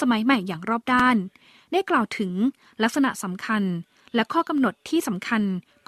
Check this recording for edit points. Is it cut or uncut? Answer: uncut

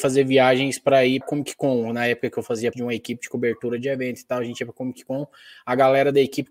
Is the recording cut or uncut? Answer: cut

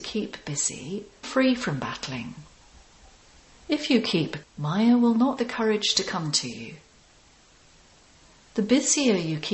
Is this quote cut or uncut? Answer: cut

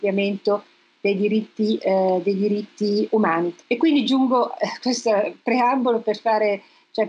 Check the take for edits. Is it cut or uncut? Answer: cut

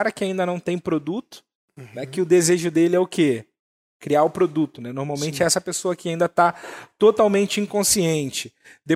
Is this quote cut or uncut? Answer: uncut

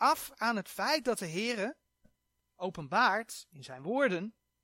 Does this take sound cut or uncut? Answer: uncut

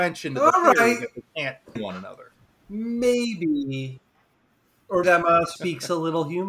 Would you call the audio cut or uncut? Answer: cut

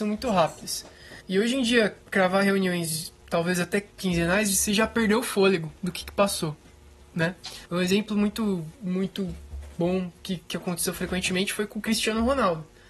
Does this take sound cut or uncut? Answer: cut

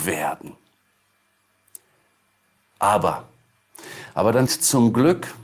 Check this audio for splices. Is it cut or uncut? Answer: cut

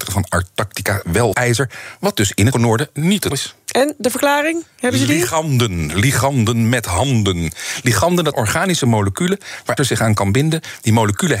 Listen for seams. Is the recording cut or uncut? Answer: cut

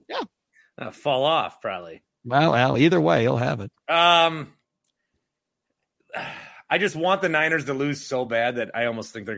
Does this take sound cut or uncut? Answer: uncut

